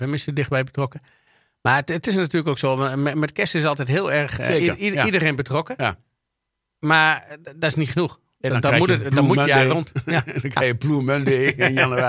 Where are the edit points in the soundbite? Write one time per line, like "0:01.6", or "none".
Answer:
none